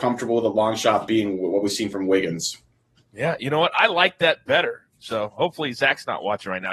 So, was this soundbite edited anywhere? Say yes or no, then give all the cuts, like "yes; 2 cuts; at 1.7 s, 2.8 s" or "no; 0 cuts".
no; 0 cuts